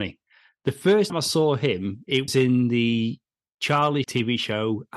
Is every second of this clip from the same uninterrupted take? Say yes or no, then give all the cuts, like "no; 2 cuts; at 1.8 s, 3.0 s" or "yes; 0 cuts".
no; 3 cuts; at 1.1 s, 2.3 s, 4.0 s